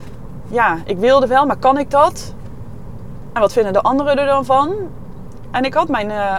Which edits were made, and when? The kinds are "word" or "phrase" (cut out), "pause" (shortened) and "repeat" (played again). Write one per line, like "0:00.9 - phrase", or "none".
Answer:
none